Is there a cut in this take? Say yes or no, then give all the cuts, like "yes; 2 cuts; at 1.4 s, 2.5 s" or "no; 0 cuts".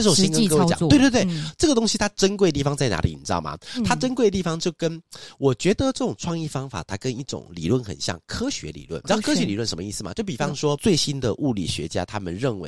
no; 0 cuts